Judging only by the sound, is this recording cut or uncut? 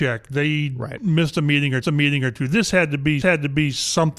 cut